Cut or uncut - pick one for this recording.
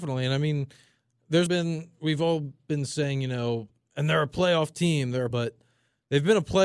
cut